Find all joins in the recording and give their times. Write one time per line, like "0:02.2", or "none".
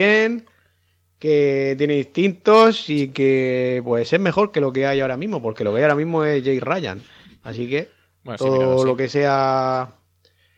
none